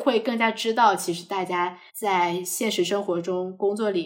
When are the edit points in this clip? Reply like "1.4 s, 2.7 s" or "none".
1.9 s